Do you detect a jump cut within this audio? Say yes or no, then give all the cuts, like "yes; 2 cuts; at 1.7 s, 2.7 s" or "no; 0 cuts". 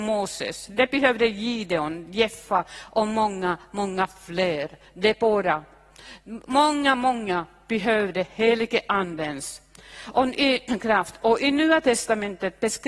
no; 0 cuts